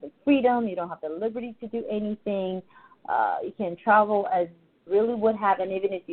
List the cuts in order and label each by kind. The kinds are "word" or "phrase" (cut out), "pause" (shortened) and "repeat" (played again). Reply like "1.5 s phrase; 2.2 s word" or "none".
4.9 s word